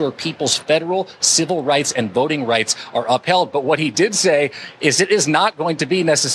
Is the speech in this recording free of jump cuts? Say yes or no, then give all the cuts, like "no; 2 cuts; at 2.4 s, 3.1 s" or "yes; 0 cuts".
yes; 0 cuts